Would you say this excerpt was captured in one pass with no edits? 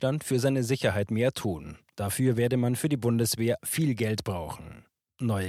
yes; 0 cuts

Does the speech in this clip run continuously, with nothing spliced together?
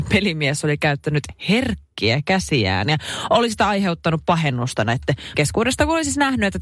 no; 1 cut; at 5.3 s

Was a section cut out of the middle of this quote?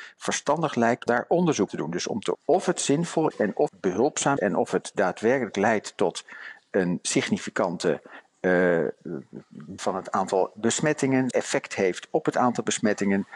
yes; 8 cuts; at 1.1 s, 1.7 s, 2.3 s, 3.3 s, 3.7 s, 4.4 s, 9.8 s, 11.3 s

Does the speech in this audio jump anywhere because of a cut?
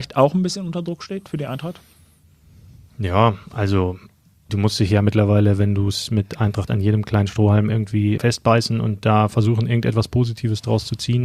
yes; 3 cuts; at 4.5 s, 6.7 s, 8.2 s

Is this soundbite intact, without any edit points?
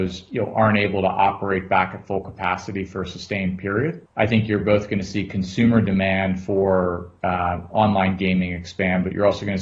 no; 1 cut; at 4.1 s

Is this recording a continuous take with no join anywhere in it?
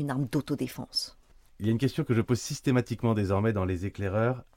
yes; 0 cuts

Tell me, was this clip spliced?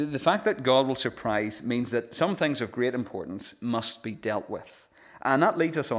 no; 0 cuts

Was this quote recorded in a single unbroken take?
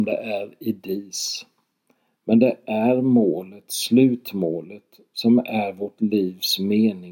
yes; 0 cuts

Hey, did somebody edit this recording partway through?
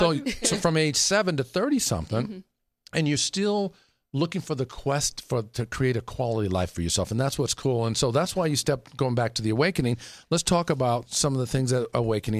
no; 0 cuts

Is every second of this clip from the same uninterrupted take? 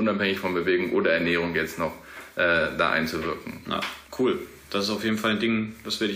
no; 1 cut; at 4.1 s

